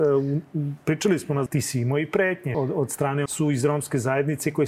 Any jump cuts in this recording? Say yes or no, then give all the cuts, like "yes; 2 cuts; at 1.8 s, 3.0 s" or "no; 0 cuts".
yes; 3 cuts; at 1.5 s, 2.5 s, 3.3 s